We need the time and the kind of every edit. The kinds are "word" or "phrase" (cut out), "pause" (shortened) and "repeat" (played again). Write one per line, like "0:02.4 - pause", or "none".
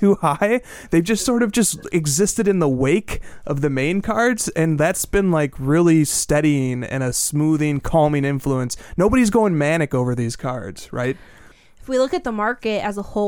none